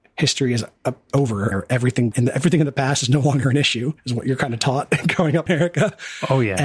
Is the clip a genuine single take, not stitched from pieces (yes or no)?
no